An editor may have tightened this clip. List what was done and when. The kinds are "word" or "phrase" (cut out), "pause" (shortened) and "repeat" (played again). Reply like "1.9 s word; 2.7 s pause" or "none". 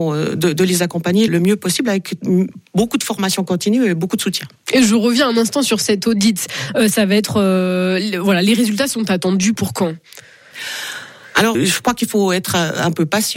1.3 s word; 9.6 s word; 11.5 s word